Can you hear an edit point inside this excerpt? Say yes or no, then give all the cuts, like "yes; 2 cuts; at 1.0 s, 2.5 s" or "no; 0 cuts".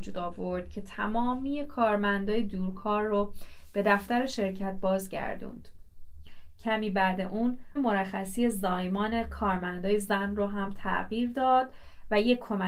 yes; 1 cut; at 7.8 s